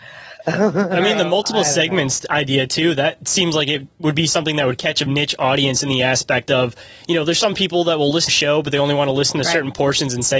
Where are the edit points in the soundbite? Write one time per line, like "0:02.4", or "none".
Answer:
0:05.1
0:08.3